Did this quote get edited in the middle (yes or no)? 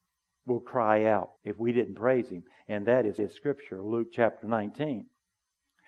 yes